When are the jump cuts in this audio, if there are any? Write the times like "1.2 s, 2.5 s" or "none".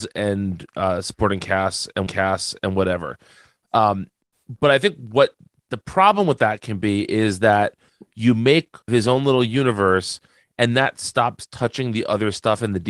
2.1 s, 8.9 s